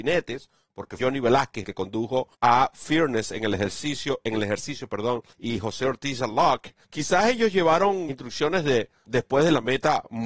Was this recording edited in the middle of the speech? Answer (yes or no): yes